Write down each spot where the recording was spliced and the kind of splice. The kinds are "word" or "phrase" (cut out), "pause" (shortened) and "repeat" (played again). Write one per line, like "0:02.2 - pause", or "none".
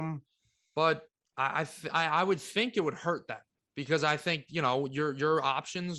none